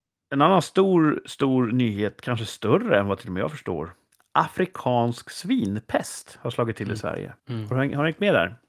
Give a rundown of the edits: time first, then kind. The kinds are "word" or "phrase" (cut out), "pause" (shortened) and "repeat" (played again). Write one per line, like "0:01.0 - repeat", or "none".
0:04.1 - pause
0:07.4 - pause